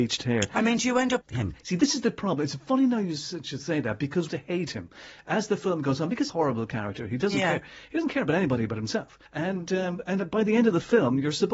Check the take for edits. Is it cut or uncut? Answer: cut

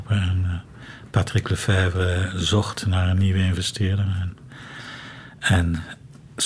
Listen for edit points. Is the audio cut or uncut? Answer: uncut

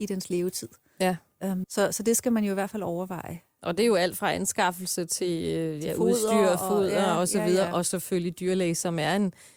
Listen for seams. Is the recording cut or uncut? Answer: cut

